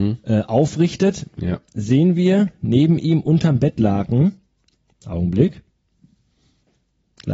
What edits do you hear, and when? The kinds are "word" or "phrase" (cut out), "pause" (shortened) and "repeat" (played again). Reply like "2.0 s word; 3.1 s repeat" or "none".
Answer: none